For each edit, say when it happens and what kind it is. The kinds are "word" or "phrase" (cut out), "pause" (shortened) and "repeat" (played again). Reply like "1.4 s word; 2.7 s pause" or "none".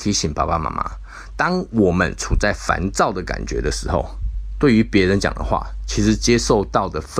none